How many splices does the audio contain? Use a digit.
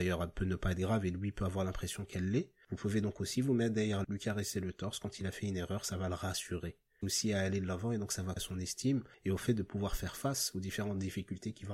3